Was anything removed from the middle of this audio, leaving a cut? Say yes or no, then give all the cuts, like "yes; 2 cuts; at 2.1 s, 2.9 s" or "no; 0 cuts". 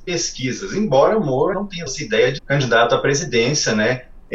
yes; 3 cuts; at 1.5 s, 1.9 s, 2.4 s